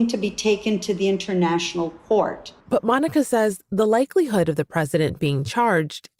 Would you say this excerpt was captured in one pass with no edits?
no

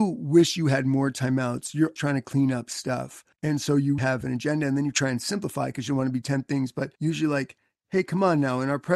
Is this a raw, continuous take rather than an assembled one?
no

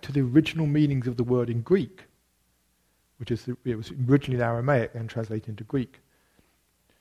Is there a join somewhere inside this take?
no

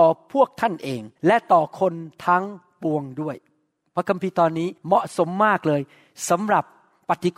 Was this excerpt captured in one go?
no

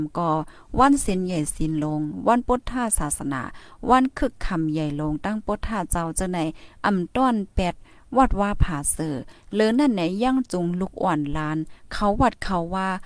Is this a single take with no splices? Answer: yes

